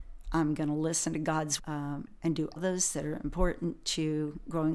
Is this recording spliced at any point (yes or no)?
yes